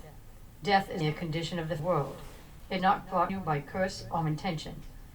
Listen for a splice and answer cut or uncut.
cut